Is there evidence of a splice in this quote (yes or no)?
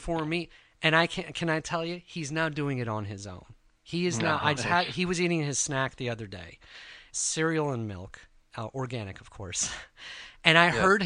yes